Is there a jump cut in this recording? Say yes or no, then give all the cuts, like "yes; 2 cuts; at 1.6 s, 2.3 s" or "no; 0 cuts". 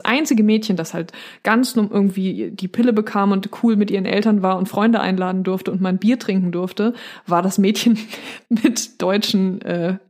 no; 0 cuts